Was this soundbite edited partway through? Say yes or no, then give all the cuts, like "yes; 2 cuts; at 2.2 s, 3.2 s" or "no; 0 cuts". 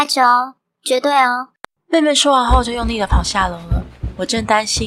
yes; 1 cut; at 1.5 s